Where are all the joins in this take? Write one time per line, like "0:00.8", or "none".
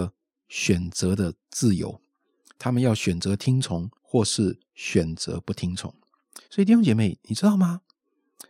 0:04.0
0:06.4